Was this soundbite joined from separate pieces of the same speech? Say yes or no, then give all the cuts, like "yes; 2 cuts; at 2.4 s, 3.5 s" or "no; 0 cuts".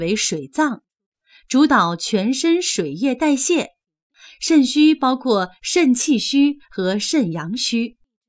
no; 0 cuts